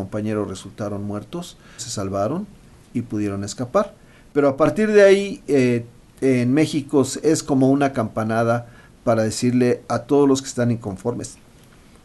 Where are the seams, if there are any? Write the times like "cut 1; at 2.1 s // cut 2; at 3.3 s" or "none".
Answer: cut 1; at 1.8 s